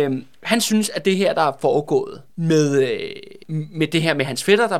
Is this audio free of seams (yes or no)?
no